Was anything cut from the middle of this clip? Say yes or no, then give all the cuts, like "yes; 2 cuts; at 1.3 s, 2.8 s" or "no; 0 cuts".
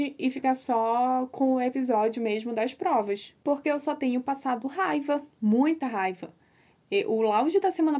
yes; 1 cut; at 5.3 s